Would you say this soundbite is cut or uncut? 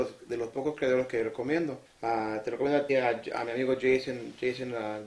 cut